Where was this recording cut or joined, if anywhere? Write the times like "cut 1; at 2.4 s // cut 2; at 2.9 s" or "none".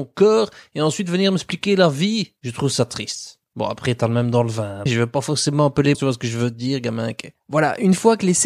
cut 1; at 2.4 s // cut 2; at 3.4 s // cut 3; at 4.9 s // cut 4; at 5.9 s